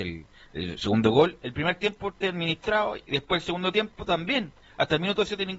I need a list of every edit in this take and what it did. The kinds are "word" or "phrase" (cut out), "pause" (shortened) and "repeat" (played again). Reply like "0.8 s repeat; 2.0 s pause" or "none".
2.2 s word

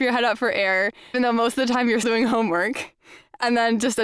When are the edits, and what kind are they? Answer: 1.1 s word; 2.0 s word

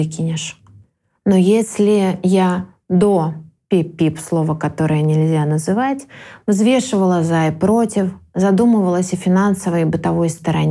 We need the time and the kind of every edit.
none

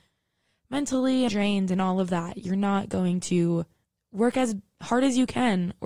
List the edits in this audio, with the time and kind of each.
1.3 s word

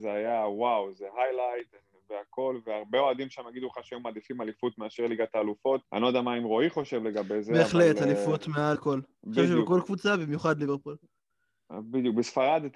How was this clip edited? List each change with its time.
5.8 s pause; 8.8 s word; 9.1 s pause

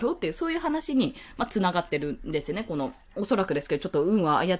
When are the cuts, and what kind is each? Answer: none

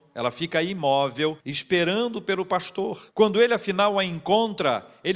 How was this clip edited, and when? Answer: 1.4 s pause; 3.1 s pause

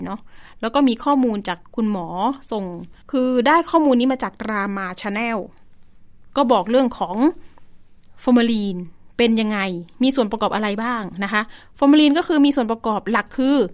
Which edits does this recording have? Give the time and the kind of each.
3.0 s pause

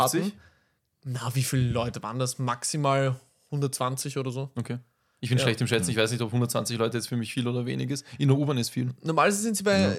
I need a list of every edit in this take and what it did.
none

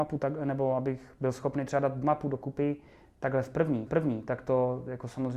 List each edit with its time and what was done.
3.9 s repeat

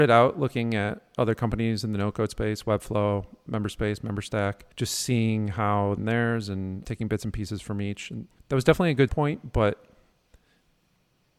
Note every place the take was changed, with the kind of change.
3.5 s word; 4.7 s pause; 6.0 s phrase; 6.8 s word; 8.4 s pause; 9.1 s word

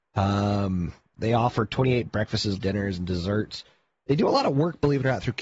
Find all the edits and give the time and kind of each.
2.6 s word

